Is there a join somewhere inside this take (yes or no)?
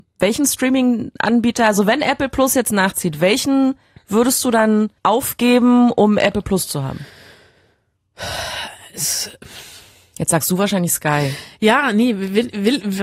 yes